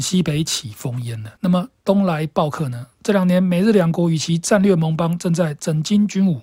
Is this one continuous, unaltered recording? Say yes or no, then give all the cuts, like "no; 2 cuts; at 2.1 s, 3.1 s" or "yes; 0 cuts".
no; 2 cuts; at 1.4 s, 2.9 s